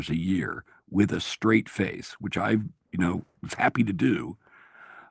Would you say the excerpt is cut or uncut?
uncut